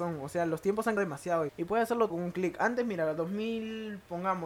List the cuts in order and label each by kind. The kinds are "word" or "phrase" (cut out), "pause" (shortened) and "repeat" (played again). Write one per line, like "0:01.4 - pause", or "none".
0:01.0 - word
0:01.5 - word
0:02.1 - word